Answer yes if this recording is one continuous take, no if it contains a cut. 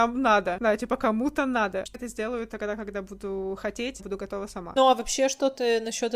no